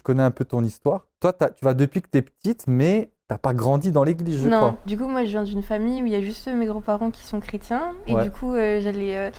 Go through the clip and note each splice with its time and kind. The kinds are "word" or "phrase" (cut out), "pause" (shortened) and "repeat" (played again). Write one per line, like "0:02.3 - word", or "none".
none